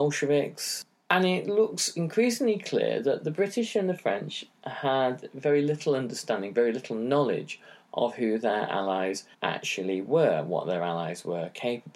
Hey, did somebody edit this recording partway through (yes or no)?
yes